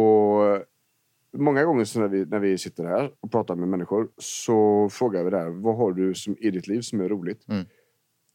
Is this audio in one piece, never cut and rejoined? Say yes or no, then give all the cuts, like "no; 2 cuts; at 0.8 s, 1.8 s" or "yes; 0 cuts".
no; 2 cuts; at 3.2 s, 4.1 s